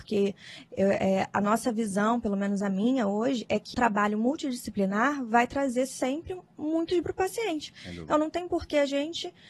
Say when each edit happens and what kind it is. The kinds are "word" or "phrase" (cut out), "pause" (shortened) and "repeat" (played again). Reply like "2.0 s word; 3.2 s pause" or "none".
3.7 s word; 7.0 s word